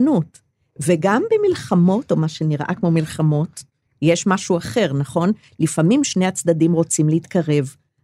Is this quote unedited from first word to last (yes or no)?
yes